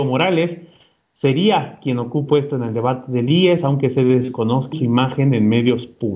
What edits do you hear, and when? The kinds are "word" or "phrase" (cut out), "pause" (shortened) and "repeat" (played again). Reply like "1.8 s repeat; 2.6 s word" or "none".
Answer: 2.3 s word; 4.7 s word